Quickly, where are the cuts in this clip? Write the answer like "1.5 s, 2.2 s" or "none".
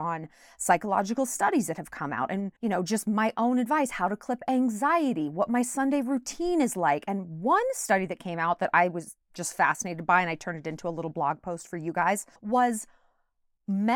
2.6 s, 9.2 s, 12.4 s